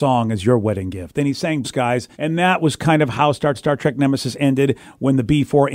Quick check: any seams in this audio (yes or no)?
yes